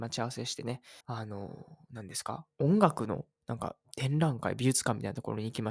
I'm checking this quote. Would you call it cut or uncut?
cut